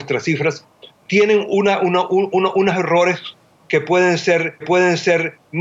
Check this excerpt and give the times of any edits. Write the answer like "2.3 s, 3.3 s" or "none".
0.9 s, 4.6 s